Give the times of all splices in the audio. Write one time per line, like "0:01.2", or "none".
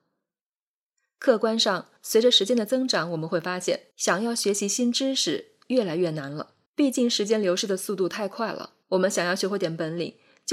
0:02.0
0:03.9
0:06.7
0:08.8